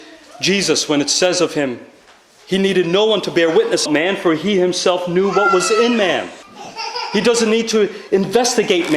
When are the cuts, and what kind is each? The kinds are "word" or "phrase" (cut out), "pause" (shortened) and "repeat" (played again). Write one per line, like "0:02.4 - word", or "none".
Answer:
0:03.9 - word